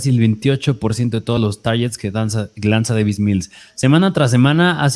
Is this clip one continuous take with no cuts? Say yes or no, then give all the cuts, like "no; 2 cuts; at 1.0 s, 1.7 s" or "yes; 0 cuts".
yes; 0 cuts